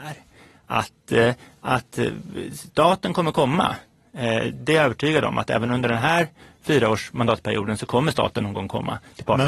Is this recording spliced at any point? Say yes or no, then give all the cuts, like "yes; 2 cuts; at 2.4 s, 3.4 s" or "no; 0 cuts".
no; 0 cuts